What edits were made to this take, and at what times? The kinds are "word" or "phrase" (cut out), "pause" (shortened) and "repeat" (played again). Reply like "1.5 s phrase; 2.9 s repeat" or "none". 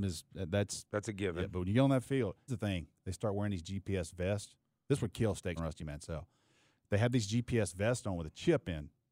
2.5 s word; 5.6 s word